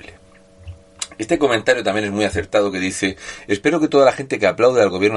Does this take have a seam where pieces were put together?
no; 0 cuts

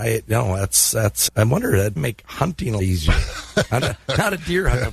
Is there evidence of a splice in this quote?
yes; 4 cuts; at 1.3 s, 2.0 s, 2.8 s, 3.8 s

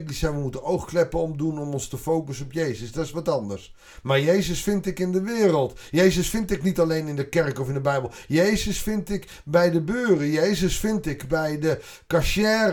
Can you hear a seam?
no; 0 cuts

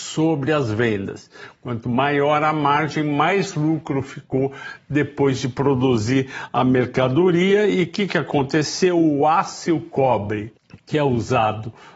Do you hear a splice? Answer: no; 0 cuts

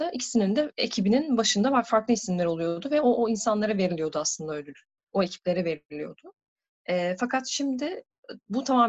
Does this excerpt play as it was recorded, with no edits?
yes; 0 cuts

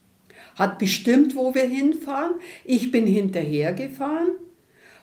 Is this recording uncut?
yes; 0 cuts

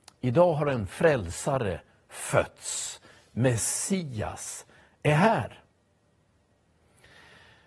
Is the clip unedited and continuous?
yes; 0 cuts

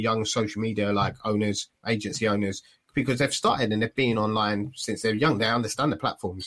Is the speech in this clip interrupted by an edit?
no; 0 cuts

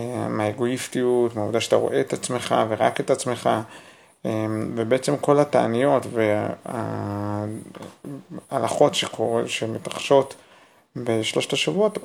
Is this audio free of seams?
yes; 0 cuts

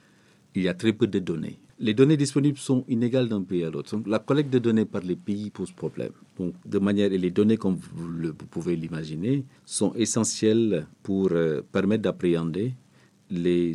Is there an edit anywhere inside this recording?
yes; 4 cuts; at 5.5 s, 6.6 s, 9.6 s, 10.9 s

